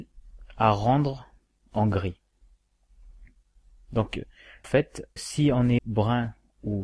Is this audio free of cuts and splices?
no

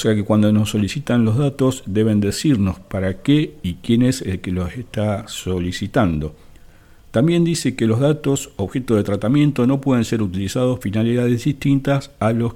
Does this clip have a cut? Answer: yes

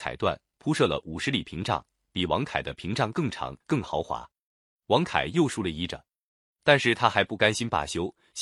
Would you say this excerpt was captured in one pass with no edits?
no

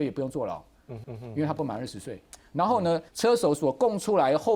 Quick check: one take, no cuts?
no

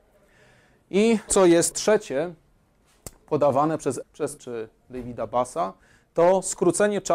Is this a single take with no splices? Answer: no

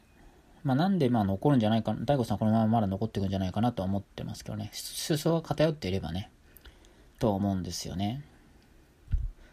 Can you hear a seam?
no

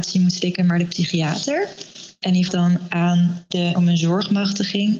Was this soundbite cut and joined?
yes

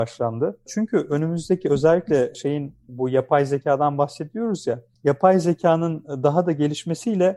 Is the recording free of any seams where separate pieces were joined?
yes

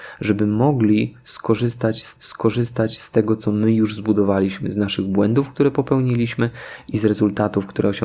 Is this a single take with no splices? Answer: no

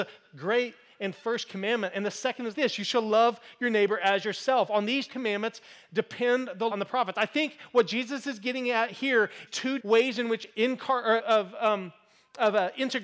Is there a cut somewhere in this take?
yes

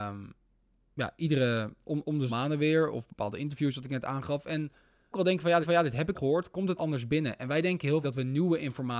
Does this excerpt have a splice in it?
yes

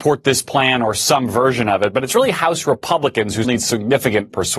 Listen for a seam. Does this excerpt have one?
yes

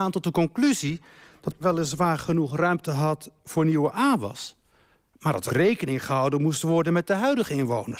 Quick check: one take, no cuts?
no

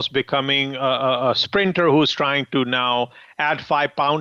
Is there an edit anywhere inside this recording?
no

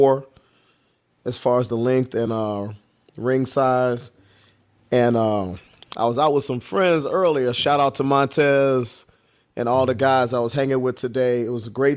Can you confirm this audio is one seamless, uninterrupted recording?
yes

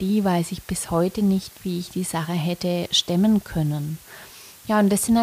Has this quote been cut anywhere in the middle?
no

